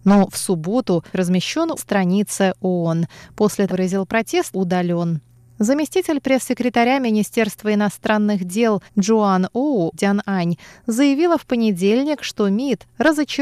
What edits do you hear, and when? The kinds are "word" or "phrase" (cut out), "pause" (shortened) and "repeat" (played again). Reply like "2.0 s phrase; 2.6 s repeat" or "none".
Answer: 1.1 s word; 1.8 s phrase; 3.7 s phrase; 4.5 s phrase; 8.9 s pause; 9.9 s word